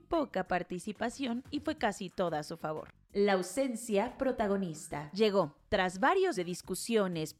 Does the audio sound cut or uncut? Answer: cut